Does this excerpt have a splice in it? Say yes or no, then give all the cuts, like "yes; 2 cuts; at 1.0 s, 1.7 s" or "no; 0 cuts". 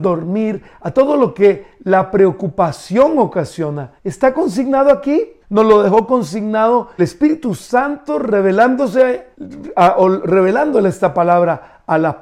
yes; 4 cuts; at 4.0 s, 5.4 s, 7.0 s, 9.3 s